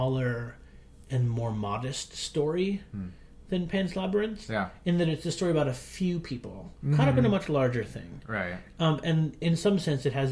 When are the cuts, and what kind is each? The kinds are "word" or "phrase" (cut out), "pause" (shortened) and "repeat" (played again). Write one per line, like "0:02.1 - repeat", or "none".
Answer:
0:09.4 - word